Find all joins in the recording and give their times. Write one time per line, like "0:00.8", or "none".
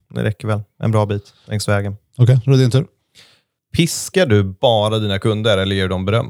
none

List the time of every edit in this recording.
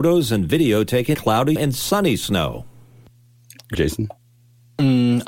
0:01.1
0:01.6
0:03.7

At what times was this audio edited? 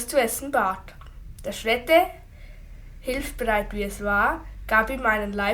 none

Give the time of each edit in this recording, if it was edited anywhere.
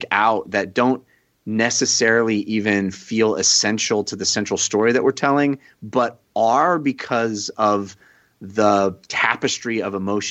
none

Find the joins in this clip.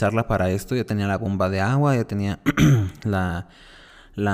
none

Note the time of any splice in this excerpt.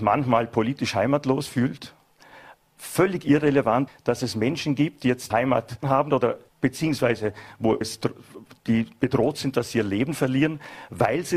0:02.6
0:03.9
0:05.3
0:05.8
0:06.5
0:07.8

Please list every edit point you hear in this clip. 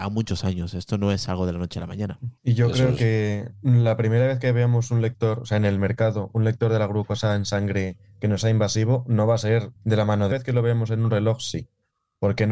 0:02.4
0:09.8
0:10.3

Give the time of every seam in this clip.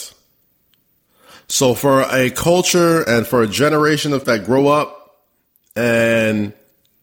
0:04.2

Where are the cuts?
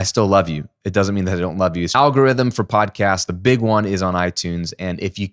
0:01.9

